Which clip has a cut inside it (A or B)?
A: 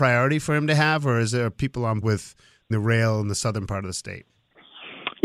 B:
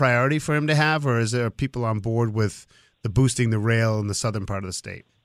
A